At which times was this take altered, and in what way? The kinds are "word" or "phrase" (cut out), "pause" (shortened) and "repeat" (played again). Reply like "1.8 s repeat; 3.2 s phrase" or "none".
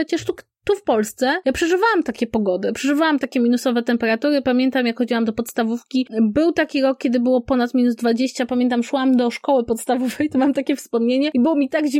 none